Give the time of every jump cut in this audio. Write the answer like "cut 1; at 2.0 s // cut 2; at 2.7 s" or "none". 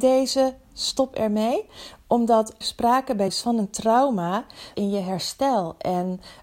cut 1; at 2.6 s // cut 2; at 3.3 s // cut 3; at 4.7 s

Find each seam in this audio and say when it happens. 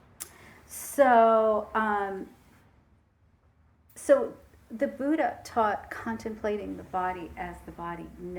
none

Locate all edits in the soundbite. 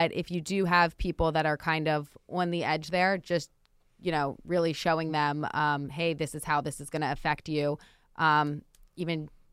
none

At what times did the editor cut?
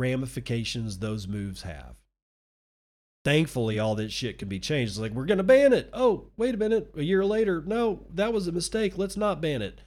none

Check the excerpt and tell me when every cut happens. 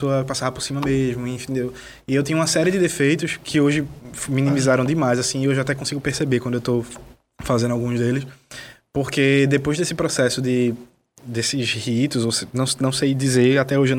none

